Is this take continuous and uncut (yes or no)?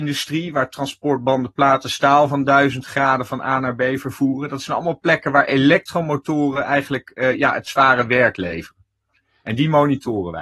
yes